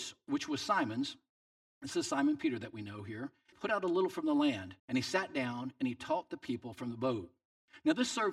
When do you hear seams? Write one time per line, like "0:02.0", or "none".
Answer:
0:03.5
0:04.8